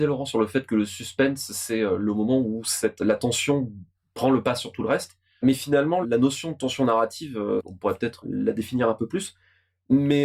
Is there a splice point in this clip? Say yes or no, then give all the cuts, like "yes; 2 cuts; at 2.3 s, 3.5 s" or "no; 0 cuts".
yes; 1 cut; at 6.0 s